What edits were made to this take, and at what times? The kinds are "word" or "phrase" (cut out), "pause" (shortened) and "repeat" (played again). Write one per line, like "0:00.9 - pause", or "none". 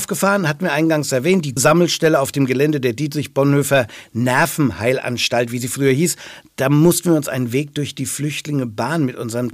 0:01.6 - word